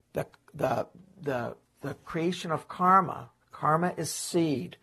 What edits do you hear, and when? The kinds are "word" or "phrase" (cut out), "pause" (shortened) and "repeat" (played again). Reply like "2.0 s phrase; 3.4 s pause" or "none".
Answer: 1.7 s word